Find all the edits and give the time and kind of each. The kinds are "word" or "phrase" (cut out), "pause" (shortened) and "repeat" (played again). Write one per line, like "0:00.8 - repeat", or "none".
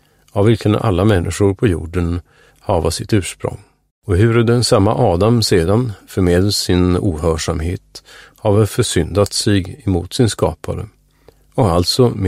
0:03.9 - pause